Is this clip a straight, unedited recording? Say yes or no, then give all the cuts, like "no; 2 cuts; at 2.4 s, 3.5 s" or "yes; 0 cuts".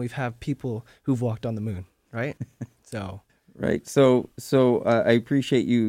no; 2 cuts; at 2.4 s, 3.3 s